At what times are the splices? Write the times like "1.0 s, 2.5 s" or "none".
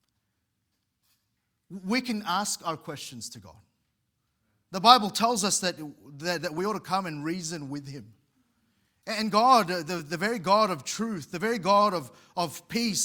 none